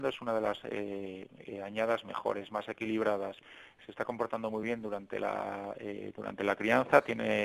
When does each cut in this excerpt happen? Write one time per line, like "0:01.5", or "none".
none